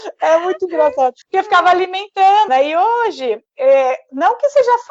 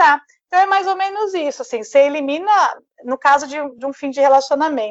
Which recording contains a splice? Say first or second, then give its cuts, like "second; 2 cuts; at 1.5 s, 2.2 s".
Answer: first; 2 cuts; at 1.2 s, 2.5 s